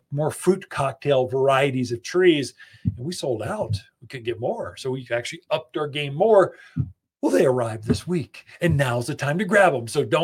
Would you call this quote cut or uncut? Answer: uncut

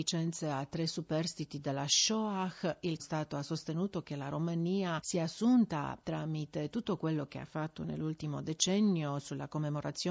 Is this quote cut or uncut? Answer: cut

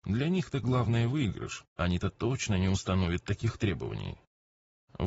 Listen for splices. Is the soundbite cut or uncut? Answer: cut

